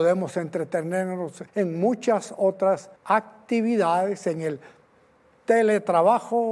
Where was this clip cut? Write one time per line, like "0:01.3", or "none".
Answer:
0:01.5
0:03.0
0:04.8